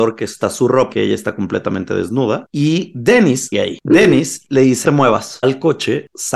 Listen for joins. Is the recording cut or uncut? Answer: cut